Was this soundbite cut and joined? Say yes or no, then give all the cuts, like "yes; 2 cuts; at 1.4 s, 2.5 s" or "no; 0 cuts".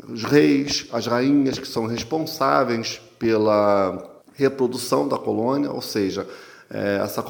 yes; 1 cut; at 4.2 s